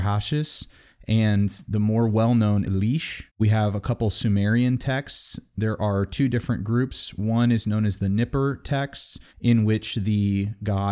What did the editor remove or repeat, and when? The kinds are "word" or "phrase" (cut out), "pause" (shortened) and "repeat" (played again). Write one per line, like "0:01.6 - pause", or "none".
0:02.6 - word
0:03.3 - pause
0:09.3 - pause